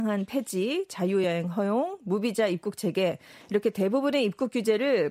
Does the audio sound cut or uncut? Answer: uncut